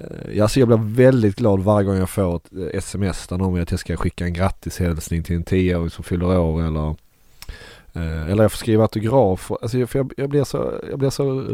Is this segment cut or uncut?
uncut